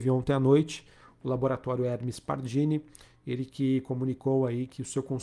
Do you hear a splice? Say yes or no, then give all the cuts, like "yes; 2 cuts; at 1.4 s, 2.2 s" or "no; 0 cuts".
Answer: no; 0 cuts